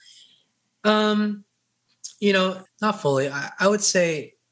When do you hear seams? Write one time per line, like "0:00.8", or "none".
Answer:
0:02.7